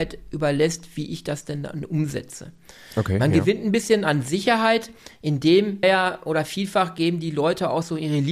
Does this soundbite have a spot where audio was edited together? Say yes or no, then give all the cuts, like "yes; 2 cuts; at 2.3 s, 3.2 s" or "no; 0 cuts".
yes; 1 cut; at 5.8 s